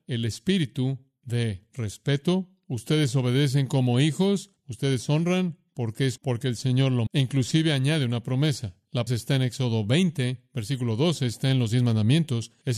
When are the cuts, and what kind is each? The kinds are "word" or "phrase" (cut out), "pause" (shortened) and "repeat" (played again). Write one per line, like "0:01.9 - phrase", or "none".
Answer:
0:06.2 - word
0:07.1 - word
0:09.1 - word